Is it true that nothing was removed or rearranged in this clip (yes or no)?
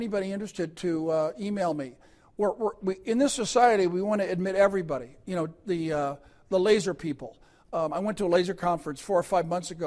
yes